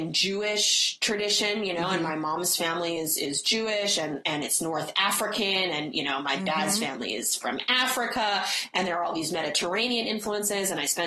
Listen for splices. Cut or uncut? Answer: uncut